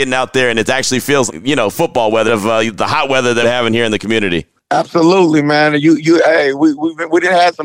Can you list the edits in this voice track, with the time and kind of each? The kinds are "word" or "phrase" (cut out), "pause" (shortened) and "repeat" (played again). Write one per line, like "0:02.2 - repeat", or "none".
0:01.3 - word
0:02.3 - word
0:03.4 - phrase